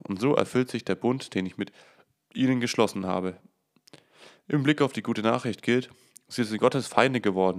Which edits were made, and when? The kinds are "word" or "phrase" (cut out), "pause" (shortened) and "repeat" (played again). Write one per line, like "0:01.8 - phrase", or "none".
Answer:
none